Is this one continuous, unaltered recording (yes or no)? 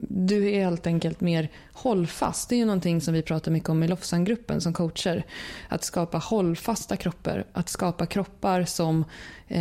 yes